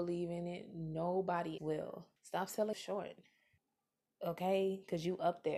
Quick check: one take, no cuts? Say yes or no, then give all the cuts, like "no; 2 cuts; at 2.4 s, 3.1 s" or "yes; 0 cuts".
no; 4 cuts; at 1.6 s, 2.2 s, 2.7 s, 3.6 s